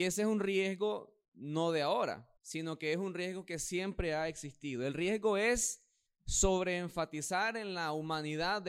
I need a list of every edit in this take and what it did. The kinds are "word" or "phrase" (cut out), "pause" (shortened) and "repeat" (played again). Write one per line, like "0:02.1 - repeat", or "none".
0:01.2 - pause
0:02.4 - pause
0:06.1 - pause